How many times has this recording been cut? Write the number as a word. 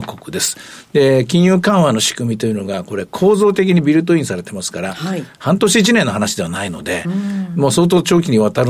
zero